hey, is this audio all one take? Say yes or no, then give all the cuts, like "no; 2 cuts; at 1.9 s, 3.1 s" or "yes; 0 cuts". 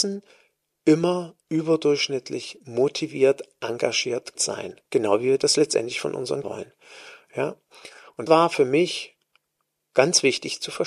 no; 5 cuts; at 1.4 s, 4.4 s, 4.9 s, 6.4 s, 8.3 s